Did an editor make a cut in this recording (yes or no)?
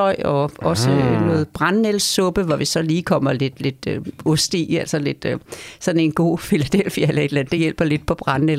no